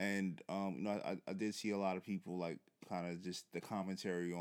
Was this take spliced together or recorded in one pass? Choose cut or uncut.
cut